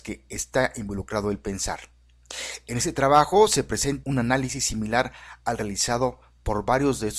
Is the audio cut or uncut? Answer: cut